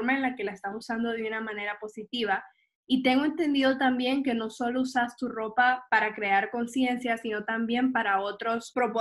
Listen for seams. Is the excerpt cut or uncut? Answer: uncut